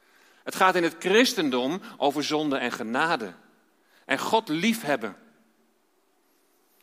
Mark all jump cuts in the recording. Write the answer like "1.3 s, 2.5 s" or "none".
none

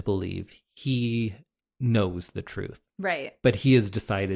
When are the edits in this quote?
2.9 s

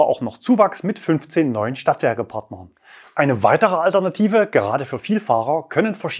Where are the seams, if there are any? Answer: none

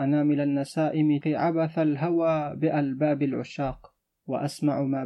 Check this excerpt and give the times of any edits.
1.2 s

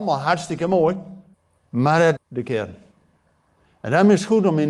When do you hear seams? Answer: 1.3 s, 2.2 s

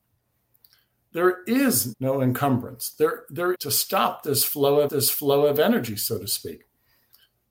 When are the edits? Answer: 1.9 s, 3.5 s, 4.9 s

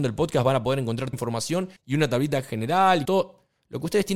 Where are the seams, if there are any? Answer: 1.1 s, 1.8 s, 3.0 s

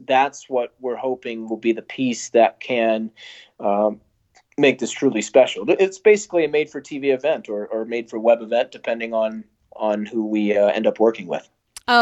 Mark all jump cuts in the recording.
none

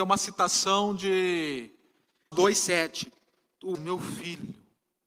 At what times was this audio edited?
2.3 s, 3.7 s

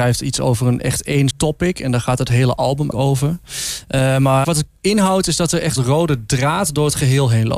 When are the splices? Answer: 1.3 s, 2.9 s, 4.4 s, 4.8 s, 5.8 s

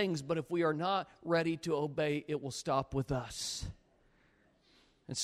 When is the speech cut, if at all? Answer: none

